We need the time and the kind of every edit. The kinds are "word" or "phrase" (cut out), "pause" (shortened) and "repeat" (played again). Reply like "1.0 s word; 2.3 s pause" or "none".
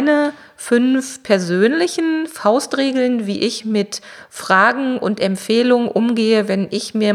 none